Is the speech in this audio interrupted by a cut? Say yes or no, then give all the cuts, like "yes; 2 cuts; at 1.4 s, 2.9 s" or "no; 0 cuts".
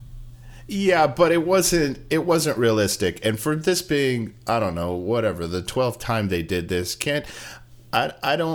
no; 0 cuts